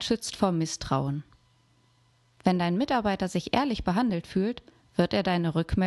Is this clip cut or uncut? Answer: uncut